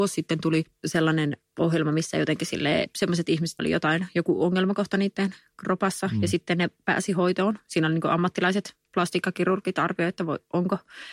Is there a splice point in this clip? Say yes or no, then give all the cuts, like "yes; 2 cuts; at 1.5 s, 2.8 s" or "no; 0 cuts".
yes; 2 cuts; at 3.6 s, 8.8 s